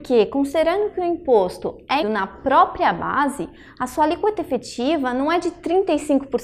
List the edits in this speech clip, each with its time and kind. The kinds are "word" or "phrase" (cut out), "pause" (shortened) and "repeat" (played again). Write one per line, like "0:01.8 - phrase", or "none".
0:02.0 - word